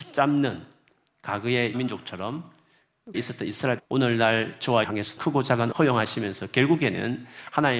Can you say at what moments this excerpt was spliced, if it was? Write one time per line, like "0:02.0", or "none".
0:01.7
0:03.1
0:03.8
0:04.8
0:05.2
0:05.7